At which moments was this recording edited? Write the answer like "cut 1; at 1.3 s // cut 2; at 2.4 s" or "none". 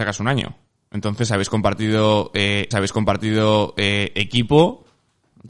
cut 1; at 2.7 s